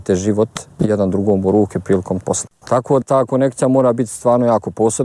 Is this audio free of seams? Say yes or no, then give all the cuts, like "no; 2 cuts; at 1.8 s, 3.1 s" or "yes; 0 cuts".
no; 2 cuts; at 2.2 s, 3.0 s